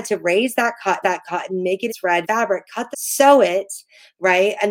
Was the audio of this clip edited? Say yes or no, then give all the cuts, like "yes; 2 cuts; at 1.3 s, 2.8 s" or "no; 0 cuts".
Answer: yes; 4 cuts; at 1.0 s, 1.9 s, 2.2 s, 2.9 s